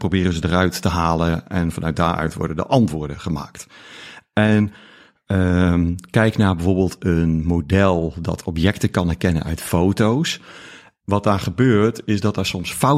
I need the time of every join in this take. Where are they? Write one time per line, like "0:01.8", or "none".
none